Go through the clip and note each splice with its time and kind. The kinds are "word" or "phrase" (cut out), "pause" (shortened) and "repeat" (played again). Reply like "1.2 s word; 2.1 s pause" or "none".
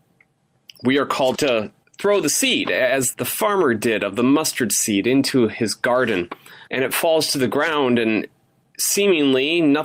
1.3 s word; 1.8 s pause; 3.1 s word; 6.7 s pause